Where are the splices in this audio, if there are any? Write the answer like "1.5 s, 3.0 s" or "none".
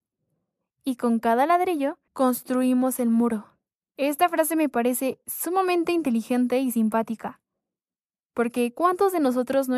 2.1 s, 3.7 s

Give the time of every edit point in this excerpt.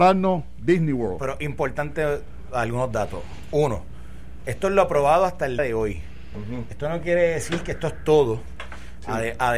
5.6 s

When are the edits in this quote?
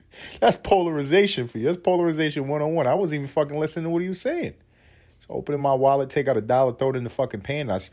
none

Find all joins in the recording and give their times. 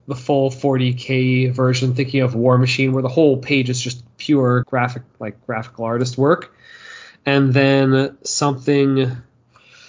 4.6 s, 5.1 s

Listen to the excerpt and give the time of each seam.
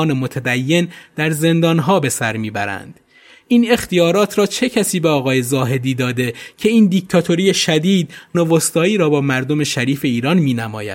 8.3 s

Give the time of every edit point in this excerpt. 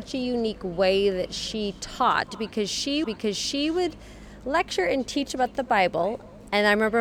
3.0 s

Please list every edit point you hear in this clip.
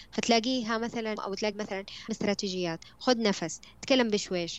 1.2 s, 1.5 s, 2.1 s

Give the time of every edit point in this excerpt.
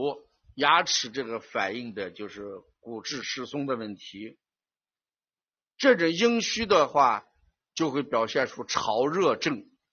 none

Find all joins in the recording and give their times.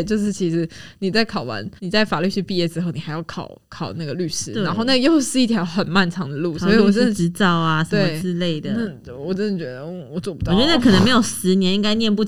1.8 s

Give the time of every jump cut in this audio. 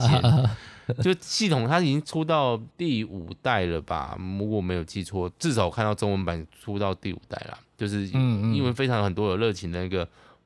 2.7 s

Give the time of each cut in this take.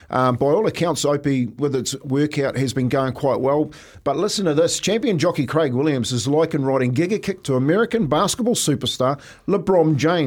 1.6 s

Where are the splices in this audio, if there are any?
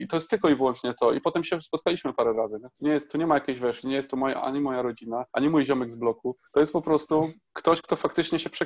2.7 s, 5.3 s, 6.5 s

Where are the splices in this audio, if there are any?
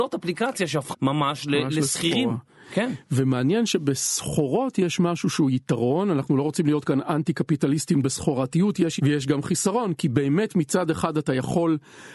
0.9 s, 8.0 s, 9.0 s

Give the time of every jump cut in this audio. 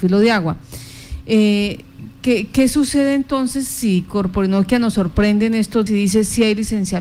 5.9 s

